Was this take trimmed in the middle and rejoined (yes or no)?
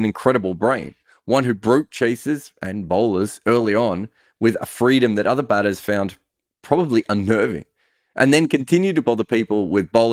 no